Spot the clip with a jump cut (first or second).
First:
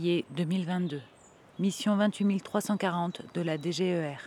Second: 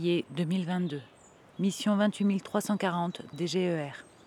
second